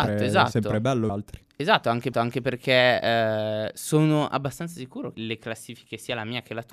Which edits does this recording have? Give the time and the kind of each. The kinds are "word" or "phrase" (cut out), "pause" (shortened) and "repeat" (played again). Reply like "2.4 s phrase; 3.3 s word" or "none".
1.1 s phrase; 2.1 s repeat; 5.1 s word